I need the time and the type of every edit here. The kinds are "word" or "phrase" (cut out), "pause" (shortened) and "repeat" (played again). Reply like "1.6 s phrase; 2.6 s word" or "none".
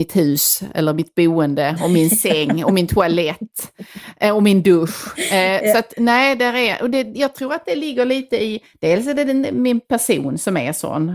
none